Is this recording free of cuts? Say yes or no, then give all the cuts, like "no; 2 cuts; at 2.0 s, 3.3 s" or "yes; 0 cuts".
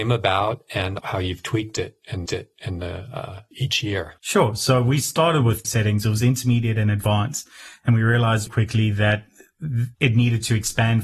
no; 7 cuts; at 1.0 s, 2.3 s, 3.5 s, 4.2 s, 5.6 s, 8.5 s, 9.9 s